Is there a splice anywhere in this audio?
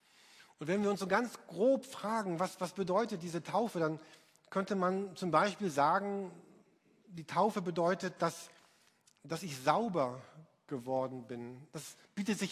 no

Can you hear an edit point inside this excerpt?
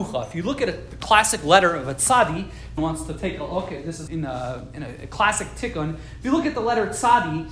yes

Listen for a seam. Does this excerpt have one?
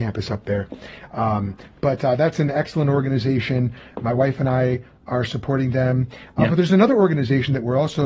no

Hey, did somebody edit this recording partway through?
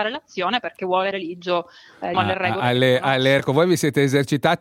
yes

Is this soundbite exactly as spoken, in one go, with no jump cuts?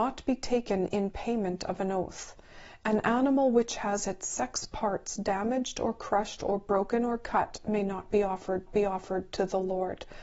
no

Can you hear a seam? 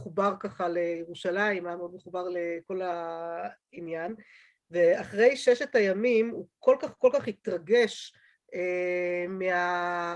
no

